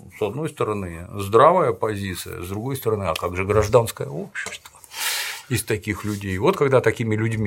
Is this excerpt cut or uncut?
uncut